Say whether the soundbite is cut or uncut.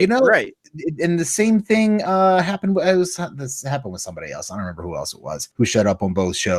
cut